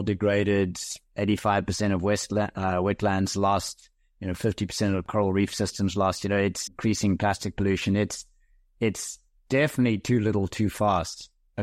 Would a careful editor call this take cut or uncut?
cut